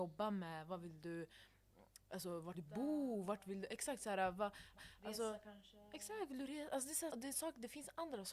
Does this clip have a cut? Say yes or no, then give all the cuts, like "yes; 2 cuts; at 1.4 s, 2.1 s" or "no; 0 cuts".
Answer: yes; 3 cuts; at 2.5 s, 4.8 s, 7.1 s